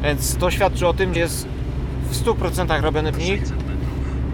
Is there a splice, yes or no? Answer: yes